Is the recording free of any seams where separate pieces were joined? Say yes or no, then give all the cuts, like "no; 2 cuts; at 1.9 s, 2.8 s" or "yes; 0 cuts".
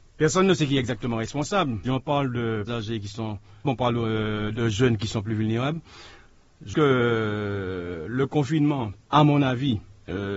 no; 5 cuts; at 1.8 s, 2.7 s, 3.6 s, 6.7 s, 9.0 s